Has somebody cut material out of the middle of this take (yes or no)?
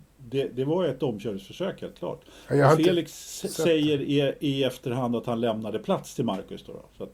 no